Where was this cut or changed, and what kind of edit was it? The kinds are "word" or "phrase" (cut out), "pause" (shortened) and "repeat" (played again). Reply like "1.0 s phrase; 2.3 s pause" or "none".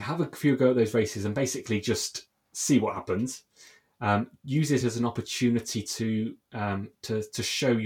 none